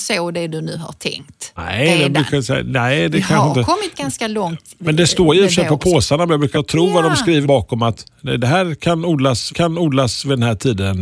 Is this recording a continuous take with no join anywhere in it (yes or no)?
no